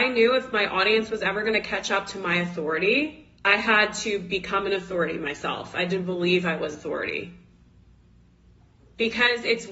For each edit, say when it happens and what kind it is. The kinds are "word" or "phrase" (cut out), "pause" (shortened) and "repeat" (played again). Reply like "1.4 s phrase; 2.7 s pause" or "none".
3.3 s pause; 6.7 s word